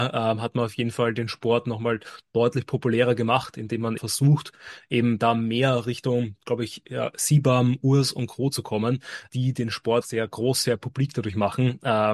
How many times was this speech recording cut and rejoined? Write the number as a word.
three